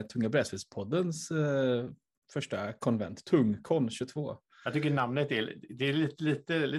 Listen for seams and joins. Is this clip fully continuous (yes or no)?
yes